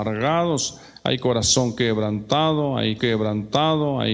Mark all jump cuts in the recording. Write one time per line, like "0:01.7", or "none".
0:03.0